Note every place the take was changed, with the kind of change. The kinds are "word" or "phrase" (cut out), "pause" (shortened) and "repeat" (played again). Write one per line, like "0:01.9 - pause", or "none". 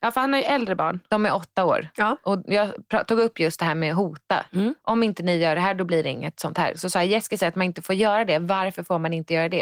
none